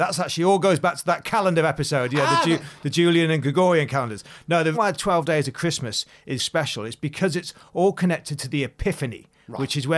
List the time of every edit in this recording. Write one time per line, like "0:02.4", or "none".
0:04.7
0:06.4